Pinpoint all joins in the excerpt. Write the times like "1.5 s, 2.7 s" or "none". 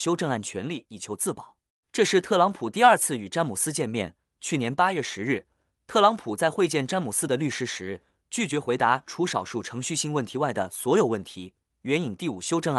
none